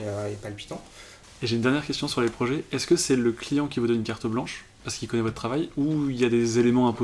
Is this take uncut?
no; 1 cut; at 4.7 s

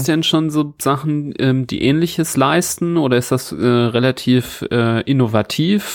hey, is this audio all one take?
yes; 0 cuts

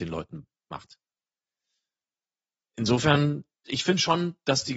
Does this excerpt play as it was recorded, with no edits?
yes; 0 cuts

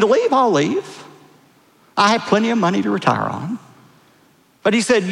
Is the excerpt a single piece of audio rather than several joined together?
yes; 0 cuts

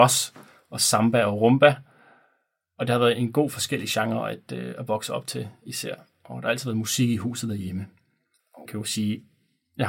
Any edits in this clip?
yes; 1 cut; at 8.7 s

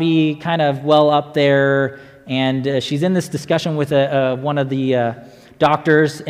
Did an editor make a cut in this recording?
no; 0 cuts

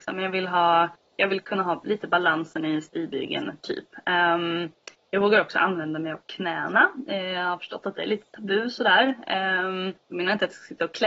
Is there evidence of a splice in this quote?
yes; 1 cut; at 10.0 s

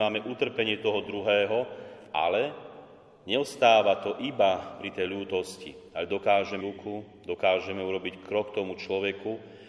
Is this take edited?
yes; 1 cut; at 6.6 s

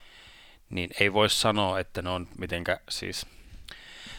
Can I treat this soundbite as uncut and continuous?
yes; 0 cuts

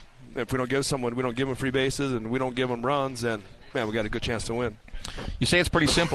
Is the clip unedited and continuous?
yes; 0 cuts

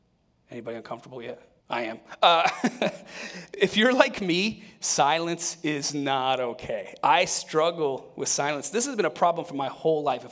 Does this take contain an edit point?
yes; 1 cut; at 1.6 s

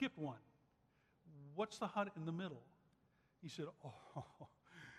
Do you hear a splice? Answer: no; 0 cuts

